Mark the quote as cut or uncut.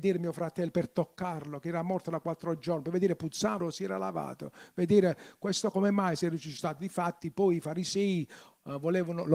cut